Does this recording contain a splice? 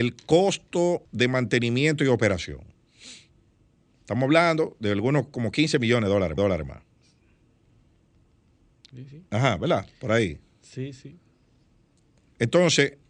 yes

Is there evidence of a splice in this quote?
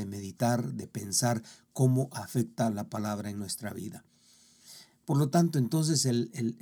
no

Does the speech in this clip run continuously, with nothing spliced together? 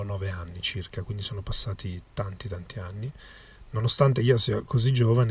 yes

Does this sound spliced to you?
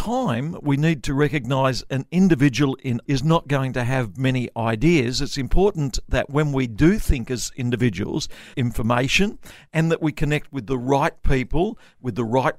yes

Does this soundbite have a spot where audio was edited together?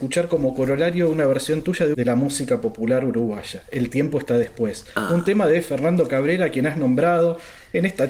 yes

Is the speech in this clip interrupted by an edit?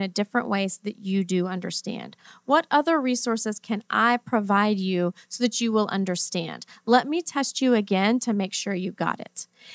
no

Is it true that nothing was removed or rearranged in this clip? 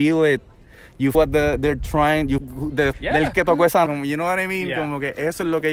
no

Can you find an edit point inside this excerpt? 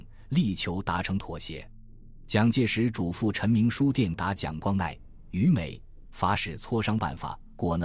yes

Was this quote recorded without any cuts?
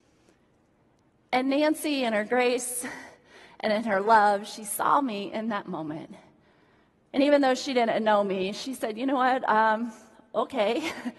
yes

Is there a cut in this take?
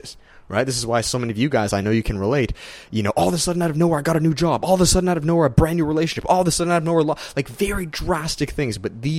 no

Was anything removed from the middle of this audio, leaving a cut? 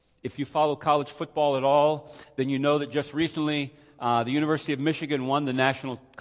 no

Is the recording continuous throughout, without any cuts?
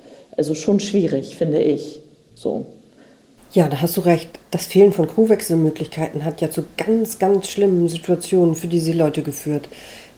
yes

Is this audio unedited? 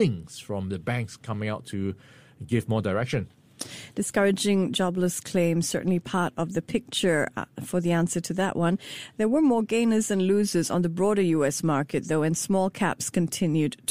yes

